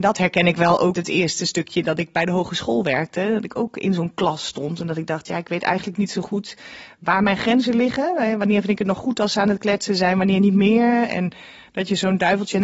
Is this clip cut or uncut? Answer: cut